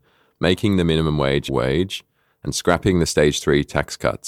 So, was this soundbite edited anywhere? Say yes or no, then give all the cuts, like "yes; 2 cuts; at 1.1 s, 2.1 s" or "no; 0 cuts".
yes; 1 cut; at 1.5 s